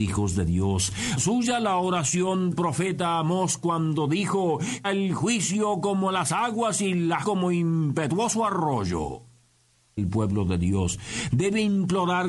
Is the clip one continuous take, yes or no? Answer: no